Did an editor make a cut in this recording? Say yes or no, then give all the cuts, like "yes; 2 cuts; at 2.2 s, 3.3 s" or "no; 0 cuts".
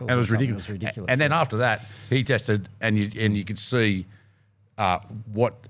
no; 0 cuts